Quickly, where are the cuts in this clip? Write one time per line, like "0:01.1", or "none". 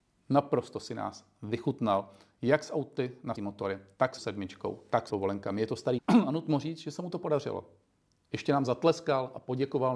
0:03.3
0:04.2
0:05.1
0:06.0